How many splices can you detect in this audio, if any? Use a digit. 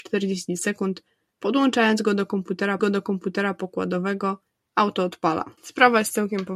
2